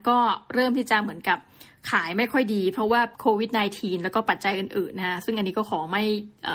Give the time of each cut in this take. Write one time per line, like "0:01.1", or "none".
0:03.1